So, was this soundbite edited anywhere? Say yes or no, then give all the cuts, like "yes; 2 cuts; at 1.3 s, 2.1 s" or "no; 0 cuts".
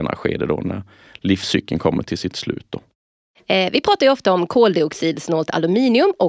no; 0 cuts